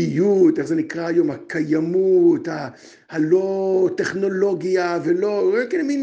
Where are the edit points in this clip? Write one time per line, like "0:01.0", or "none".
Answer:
none